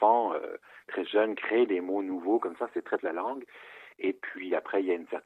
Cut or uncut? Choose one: cut